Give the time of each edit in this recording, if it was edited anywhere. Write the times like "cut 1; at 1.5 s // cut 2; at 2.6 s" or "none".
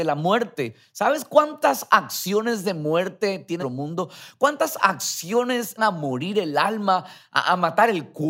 cut 1; at 3.6 s // cut 2; at 5.8 s